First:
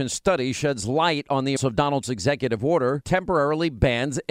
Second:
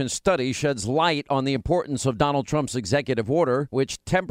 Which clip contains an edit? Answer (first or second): first